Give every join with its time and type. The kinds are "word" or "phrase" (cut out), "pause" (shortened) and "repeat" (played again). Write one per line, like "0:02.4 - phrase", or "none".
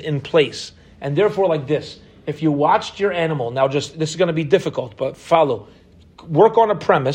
none

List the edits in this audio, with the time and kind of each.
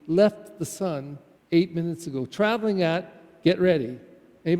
0:01.3 - pause

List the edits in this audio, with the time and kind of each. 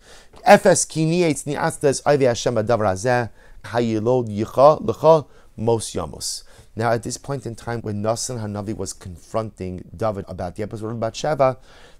0:03.6 - phrase
0:07.8 - word
0:10.2 - word

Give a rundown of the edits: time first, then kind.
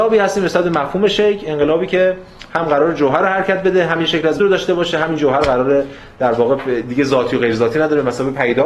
0:04.4 - phrase

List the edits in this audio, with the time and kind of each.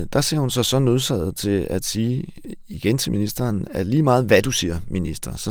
none

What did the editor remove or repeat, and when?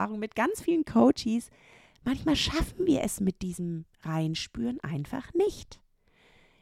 none

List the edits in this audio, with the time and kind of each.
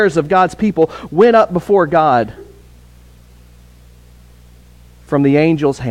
none

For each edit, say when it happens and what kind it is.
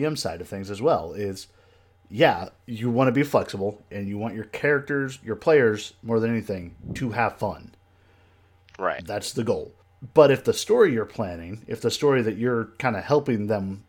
none

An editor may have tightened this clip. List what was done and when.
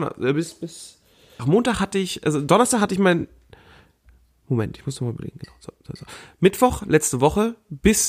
0:01.4 - word

